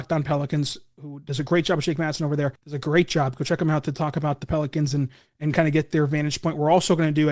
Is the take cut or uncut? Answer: cut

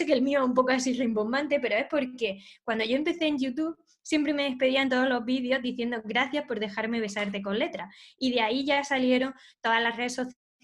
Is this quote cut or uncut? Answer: uncut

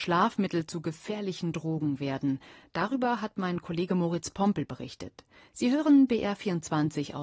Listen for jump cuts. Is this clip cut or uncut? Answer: uncut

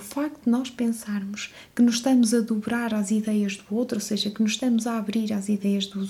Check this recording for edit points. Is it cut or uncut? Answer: uncut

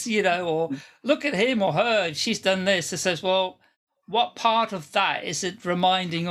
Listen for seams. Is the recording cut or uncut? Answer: uncut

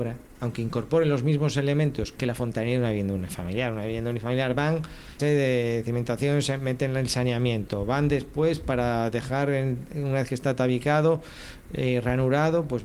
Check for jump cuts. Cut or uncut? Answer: cut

